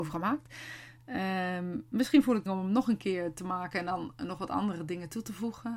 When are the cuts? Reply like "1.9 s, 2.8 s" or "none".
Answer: 2.5 s

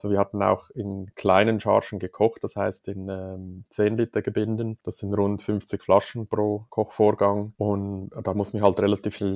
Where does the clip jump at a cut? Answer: none

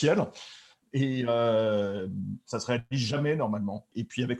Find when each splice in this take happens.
none

